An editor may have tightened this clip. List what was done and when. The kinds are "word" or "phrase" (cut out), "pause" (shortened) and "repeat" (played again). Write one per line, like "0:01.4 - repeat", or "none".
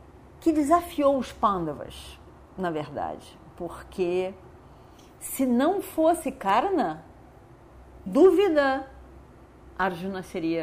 0:08.1 - word